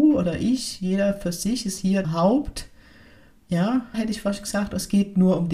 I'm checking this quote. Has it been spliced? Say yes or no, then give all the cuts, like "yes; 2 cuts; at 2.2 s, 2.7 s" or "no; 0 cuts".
yes; 2 cuts; at 2.0 s, 3.9 s